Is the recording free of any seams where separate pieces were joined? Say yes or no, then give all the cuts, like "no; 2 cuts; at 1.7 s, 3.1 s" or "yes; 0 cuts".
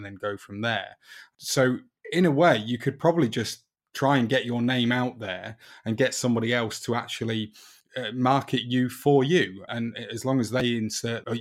yes; 0 cuts